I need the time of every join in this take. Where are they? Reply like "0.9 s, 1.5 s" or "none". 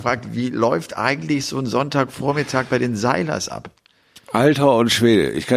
none